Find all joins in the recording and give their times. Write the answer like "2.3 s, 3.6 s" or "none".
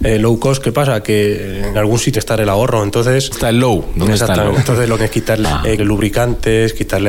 1.7 s, 2.1 s, 3.3 s, 4.5 s, 5.0 s, 5.4 s, 5.8 s